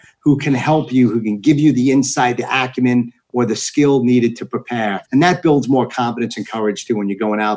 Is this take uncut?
no; 1 cut; at 5.0 s

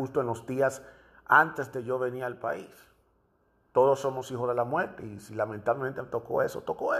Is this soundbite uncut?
yes; 0 cuts

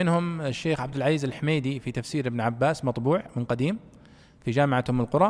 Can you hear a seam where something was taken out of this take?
no; 0 cuts

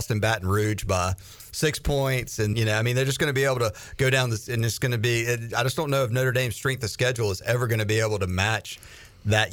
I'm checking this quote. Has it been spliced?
yes; 1 cut; at 2.5 s

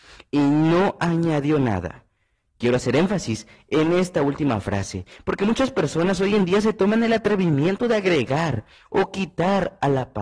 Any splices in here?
no; 0 cuts

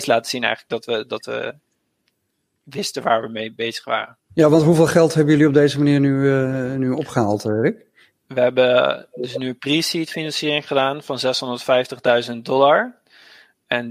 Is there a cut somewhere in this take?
yes; 1 cut; at 4.2 s

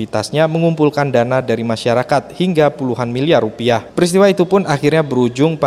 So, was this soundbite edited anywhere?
no; 0 cuts

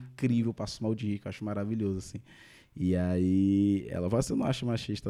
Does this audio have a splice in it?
no; 0 cuts

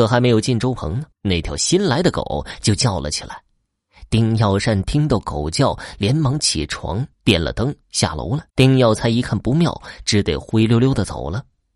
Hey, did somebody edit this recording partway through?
yes; 4 cuts; at 1.1 s, 7.1 s, 7.8 s, 8.5 s

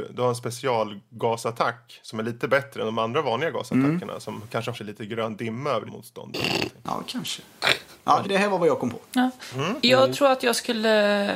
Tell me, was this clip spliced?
yes; 4 cuts; at 4.7 s, 5.9 s, 8.2 s, 9.0 s

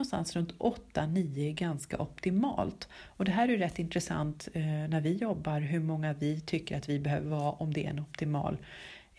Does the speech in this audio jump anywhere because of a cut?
no; 0 cuts

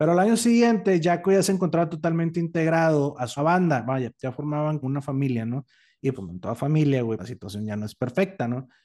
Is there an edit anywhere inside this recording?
yes; 4 cuts; at 3.4 s, 4.8 s, 6.1 s, 7.2 s

